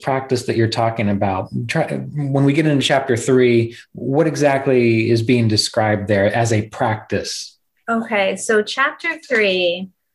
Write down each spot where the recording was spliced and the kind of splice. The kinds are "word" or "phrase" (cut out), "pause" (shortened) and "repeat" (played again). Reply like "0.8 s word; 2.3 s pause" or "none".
none